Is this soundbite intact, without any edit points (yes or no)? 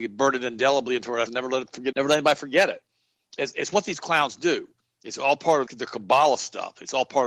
no